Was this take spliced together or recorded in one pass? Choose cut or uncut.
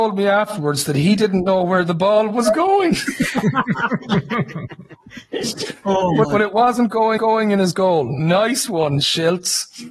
cut